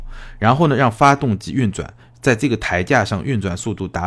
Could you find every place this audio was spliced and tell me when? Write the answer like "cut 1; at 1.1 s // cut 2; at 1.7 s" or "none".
none